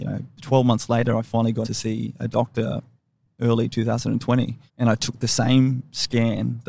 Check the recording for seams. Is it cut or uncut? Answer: cut